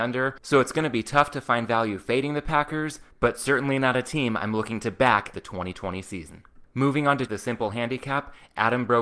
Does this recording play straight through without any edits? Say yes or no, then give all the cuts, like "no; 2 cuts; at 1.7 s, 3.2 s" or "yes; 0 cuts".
no; 2 cuts; at 5.3 s, 7.3 s